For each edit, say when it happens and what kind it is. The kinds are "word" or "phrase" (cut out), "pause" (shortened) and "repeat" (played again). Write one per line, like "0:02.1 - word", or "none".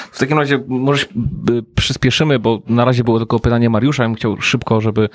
none